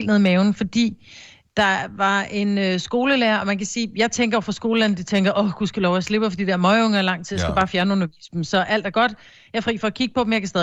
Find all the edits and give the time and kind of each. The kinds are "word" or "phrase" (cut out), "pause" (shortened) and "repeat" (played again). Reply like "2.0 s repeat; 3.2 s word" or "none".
none

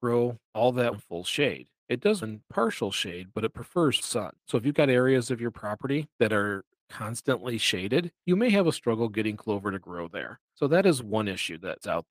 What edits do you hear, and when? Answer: 0.9 s word; 2.2 s word; 4.0 s word; 4.4 s pause; 6.1 s pause

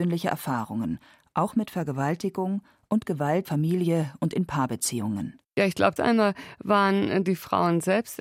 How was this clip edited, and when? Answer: 3.4 s phrase; 5.4 s pause; 6.0 s word

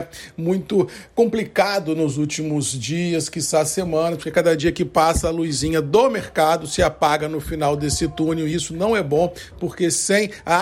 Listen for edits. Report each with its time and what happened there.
none

